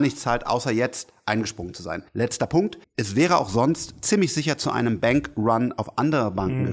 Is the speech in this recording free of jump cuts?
no; 2 cuts; at 2.1 s, 2.8 s

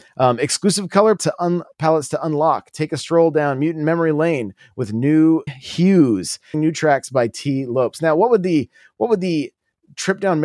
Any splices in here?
yes; 3 cuts; at 1.2 s, 5.5 s, 6.5 s

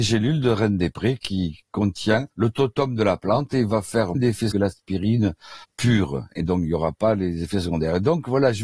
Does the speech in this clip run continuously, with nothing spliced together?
no; 4 cuts; at 2.3 s, 4.1 s, 4.5 s, 5.6 s

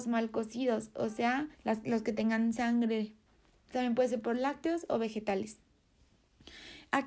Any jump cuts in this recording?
yes; 1 cut; at 1.5 s

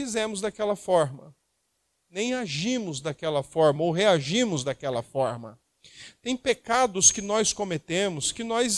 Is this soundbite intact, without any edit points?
yes; 0 cuts

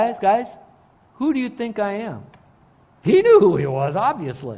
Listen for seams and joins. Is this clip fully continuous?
yes; 0 cuts

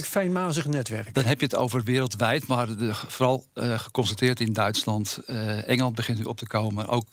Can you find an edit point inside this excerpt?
no; 0 cuts

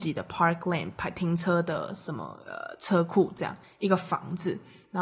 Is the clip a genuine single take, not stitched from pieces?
yes; 0 cuts

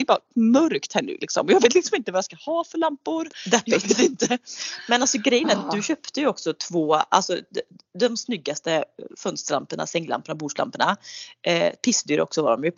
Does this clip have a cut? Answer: no; 0 cuts

